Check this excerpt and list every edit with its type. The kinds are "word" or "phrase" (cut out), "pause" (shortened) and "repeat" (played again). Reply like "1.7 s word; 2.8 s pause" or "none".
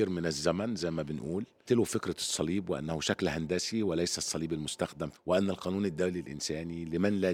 1.7 s word; 5.1 s word